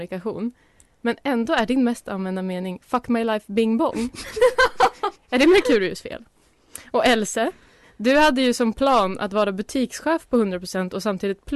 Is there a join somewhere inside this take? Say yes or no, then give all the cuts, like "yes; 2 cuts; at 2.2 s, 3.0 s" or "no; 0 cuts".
no; 0 cuts